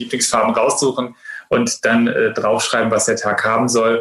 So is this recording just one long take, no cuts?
yes; 0 cuts

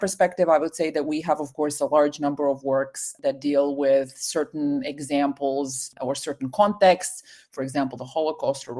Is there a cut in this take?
no; 0 cuts

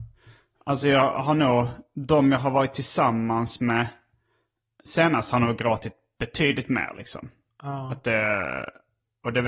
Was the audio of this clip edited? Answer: no; 0 cuts

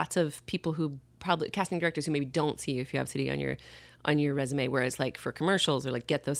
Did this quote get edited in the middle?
yes; 1 cut; at 3.1 s

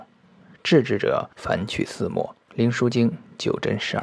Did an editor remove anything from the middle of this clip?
yes; 2 cuts; at 1.3 s, 2.4 s

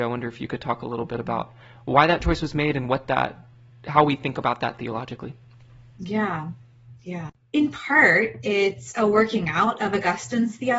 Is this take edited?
no; 0 cuts

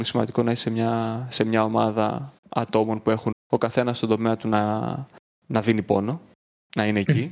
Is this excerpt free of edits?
no; 3 cuts; at 2.4 s, 3.3 s, 5.2 s

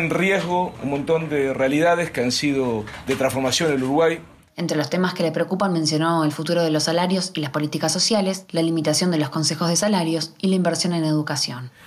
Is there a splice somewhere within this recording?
no; 0 cuts

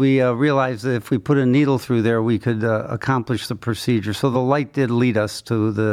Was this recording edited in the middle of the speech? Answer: no; 0 cuts

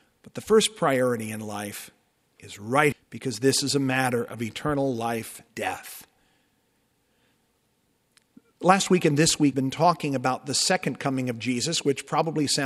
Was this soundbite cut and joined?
yes; 3 cuts; at 2.9 s, 5.5 s, 9.5 s

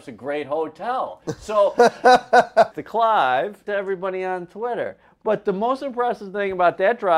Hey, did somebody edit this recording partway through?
yes; 2 cuts; at 2.7 s, 3.7 s

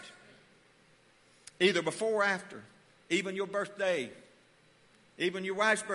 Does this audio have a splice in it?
no; 0 cuts

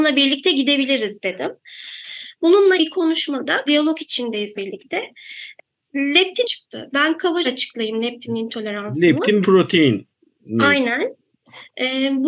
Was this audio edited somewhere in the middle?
yes; 6 cuts; at 2.8 s, 3.7 s, 4.6 s, 6.4 s, 7.4 s, 9.4 s

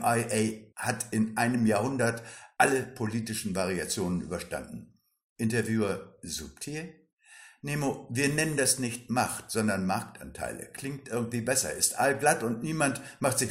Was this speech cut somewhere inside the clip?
no; 0 cuts

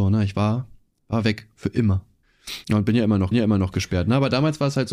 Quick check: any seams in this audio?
yes; 2 cuts; at 2.6 s, 3.3 s

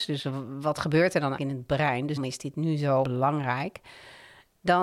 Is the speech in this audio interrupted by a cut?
yes; 3 cuts; at 1.4 s, 2.2 s, 3.0 s

